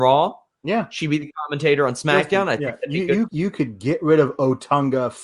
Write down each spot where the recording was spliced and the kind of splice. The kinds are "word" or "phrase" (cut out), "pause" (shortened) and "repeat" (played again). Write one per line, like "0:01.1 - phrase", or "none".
0:03.3 - word